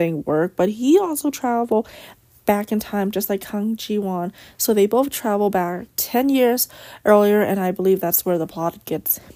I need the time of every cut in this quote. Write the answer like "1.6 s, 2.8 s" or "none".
none